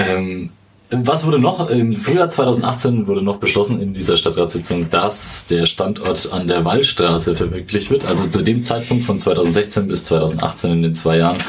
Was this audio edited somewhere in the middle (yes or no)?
no